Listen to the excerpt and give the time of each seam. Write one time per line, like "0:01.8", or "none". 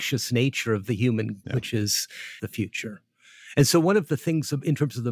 0:01.4
0:02.4